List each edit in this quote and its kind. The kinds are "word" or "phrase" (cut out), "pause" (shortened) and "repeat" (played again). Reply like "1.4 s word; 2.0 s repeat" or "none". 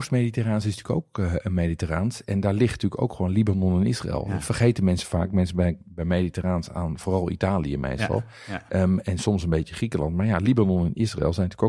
none